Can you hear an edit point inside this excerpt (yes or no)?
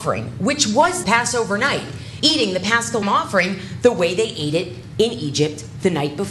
yes